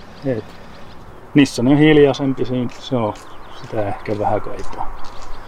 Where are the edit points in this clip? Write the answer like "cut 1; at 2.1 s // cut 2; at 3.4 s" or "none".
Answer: none